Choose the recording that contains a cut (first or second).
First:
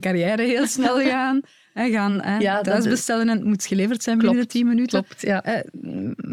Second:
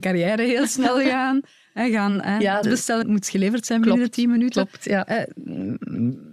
second